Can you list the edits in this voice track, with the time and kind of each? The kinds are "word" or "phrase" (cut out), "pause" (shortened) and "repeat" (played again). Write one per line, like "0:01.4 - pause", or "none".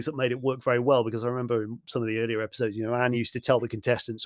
none